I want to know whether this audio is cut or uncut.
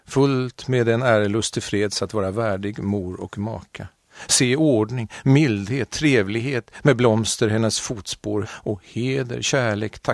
cut